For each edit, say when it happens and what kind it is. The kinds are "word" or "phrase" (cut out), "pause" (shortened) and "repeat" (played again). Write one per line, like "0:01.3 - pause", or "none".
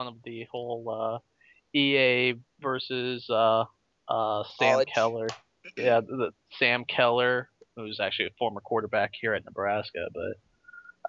0:02.5 - pause
0:07.7 - word